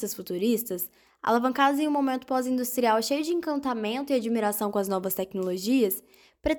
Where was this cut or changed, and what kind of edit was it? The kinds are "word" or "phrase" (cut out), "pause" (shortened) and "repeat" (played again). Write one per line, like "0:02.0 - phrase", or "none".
none